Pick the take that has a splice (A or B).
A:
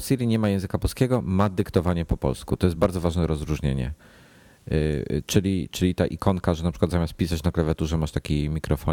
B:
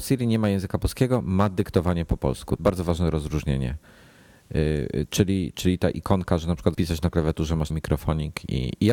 B